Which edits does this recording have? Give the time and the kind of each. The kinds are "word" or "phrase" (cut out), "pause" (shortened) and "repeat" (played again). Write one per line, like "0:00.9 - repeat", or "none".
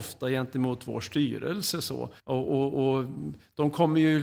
0:02.2 - pause